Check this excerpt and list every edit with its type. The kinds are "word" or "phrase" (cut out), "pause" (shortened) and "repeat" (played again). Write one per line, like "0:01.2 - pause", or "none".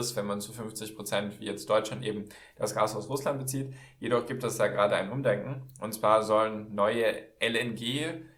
none